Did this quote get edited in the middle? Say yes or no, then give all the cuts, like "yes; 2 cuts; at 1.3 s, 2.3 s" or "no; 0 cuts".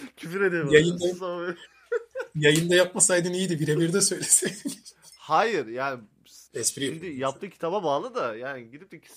yes; 1 cut; at 6.5 s